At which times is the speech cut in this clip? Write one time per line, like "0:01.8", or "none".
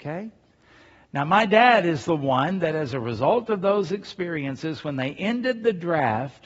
none